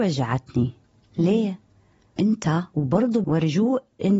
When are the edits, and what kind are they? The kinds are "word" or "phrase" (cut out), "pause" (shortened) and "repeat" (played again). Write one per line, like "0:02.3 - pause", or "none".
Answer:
0:02.2 - word
0:03.2 - word